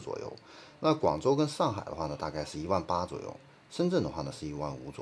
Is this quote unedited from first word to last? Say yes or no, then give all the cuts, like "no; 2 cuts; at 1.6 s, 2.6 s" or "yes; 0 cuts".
yes; 0 cuts